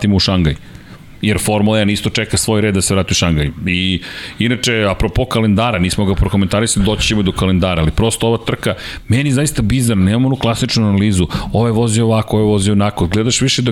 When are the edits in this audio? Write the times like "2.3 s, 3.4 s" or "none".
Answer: none

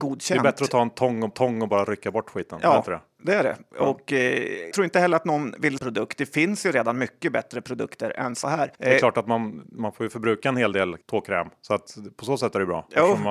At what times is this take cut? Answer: 1.3 s, 4.7 s, 5.8 s, 8.7 s, 11.0 s

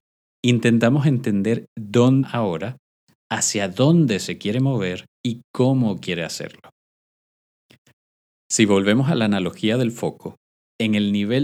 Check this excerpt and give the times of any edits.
2.2 s, 5.1 s

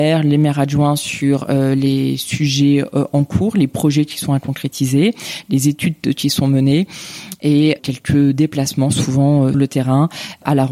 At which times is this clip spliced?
9.5 s

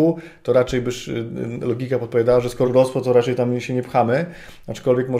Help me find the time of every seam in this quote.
2.6 s

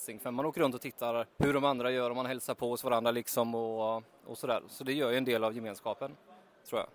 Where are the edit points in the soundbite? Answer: 1.3 s

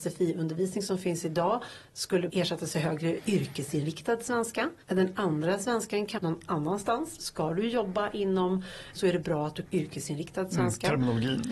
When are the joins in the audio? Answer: 2.3 s, 3.2 s, 4.8 s, 6.2 s, 7.2 s, 8.9 s, 9.6 s

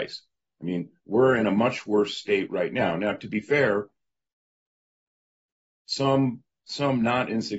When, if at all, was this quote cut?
none

